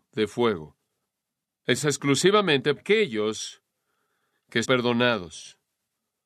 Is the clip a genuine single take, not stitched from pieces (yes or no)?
no